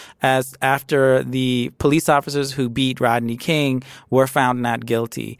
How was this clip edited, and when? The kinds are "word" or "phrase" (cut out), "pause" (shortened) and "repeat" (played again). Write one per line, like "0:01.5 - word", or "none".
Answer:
none